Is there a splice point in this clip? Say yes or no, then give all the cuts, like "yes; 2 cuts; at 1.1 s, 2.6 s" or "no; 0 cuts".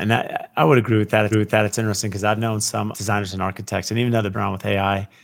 yes; 3 cuts; at 1.3 s, 2.9 s, 4.3 s